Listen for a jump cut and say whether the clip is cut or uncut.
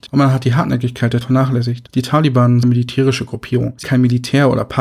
cut